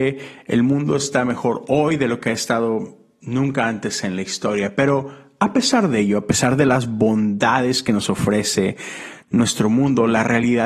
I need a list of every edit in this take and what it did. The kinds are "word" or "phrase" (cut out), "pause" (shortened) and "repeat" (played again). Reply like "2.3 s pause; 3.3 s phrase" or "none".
none